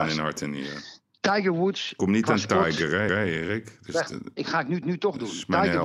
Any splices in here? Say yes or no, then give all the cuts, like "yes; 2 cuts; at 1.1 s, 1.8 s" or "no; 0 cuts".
yes; 3 cuts; at 1.0 s, 3.1 s, 4.8 s